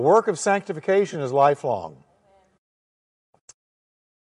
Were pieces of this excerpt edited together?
no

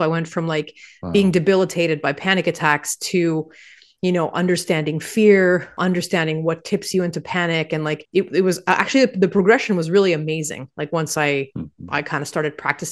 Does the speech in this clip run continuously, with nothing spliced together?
yes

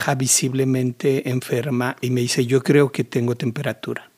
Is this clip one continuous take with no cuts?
yes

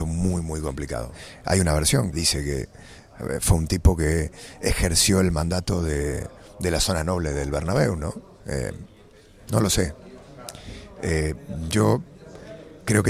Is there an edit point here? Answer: yes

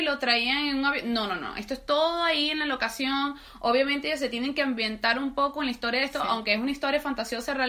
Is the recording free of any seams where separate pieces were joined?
yes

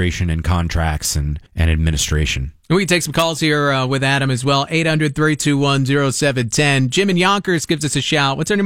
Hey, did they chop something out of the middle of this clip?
yes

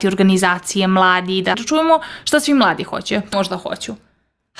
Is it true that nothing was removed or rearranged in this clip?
no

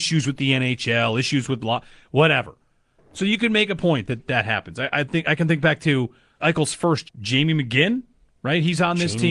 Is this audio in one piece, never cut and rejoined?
no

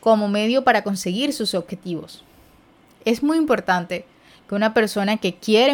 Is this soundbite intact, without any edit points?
yes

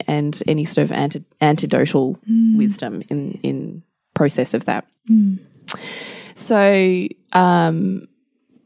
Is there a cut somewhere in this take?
no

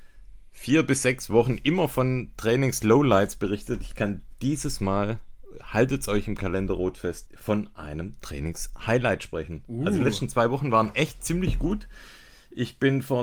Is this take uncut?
no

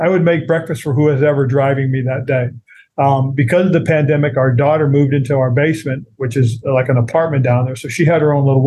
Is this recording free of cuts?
yes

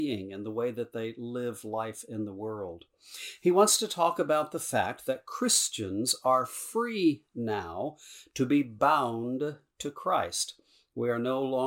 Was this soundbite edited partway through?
no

